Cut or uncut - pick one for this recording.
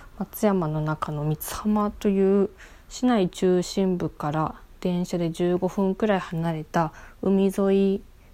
uncut